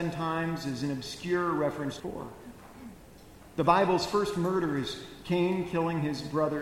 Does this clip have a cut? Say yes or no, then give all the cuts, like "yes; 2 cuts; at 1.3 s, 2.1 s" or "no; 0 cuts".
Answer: yes; 1 cut; at 2.0 s